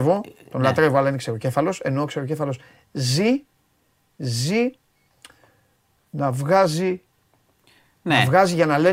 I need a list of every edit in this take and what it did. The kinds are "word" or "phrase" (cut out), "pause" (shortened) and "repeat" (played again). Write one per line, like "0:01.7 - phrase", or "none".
none